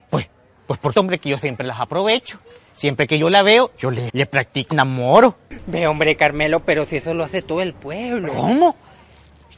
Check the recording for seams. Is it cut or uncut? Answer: cut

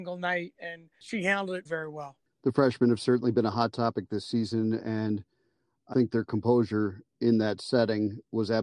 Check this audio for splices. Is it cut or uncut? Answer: cut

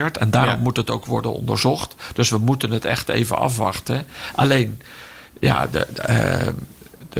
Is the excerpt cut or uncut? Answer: uncut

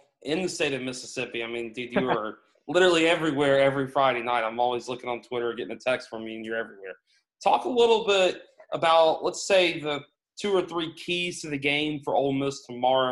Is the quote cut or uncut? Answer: uncut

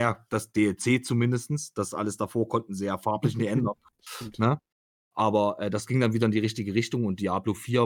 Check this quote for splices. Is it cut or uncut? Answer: uncut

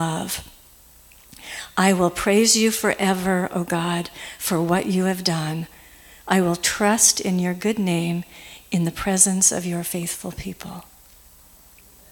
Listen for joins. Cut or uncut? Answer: uncut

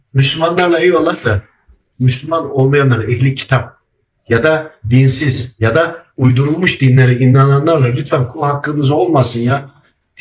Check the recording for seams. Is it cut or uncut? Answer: uncut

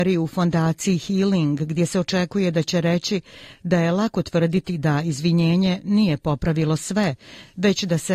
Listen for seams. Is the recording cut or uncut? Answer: uncut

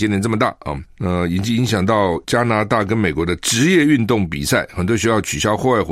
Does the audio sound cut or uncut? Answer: cut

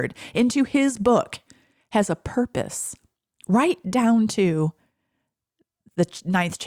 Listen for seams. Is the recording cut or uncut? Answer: uncut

